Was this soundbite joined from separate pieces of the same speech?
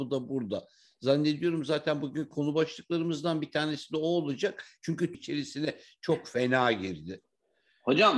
yes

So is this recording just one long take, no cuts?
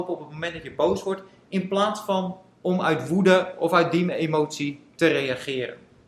yes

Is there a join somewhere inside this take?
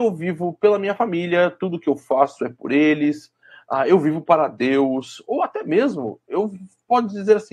no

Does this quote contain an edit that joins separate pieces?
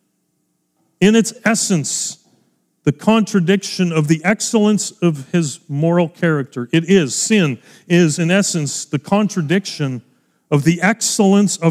no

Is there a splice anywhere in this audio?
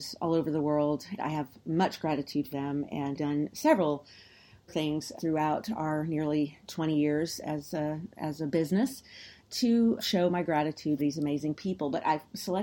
yes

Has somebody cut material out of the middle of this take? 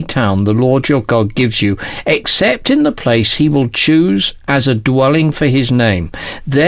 no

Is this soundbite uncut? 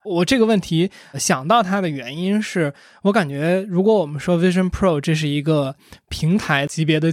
yes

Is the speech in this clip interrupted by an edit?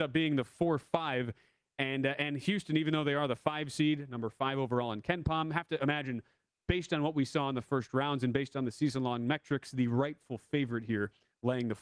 no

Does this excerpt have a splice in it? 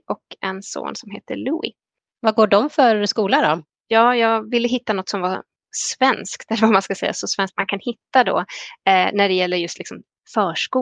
yes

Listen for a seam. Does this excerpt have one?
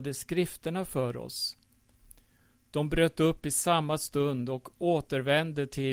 no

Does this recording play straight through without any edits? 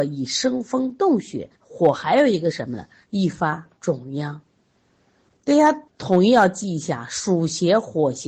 no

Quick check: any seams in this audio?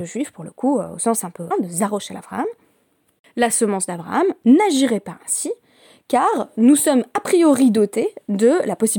yes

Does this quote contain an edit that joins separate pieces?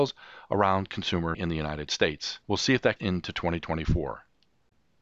yes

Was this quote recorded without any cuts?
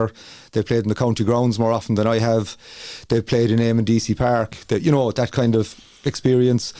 yes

